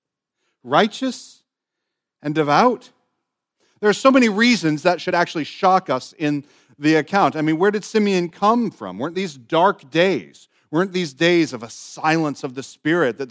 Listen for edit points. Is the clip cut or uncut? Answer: uncut